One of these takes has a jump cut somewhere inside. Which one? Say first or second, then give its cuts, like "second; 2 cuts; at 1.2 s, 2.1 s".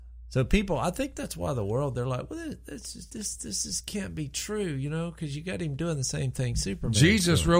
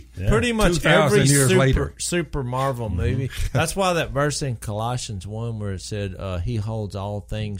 first; 1 cut; at 3.1 s